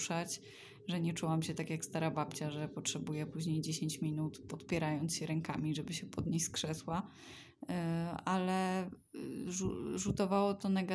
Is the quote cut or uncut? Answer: uncut